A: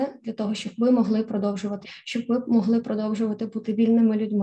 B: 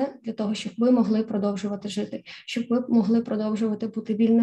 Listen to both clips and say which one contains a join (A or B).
A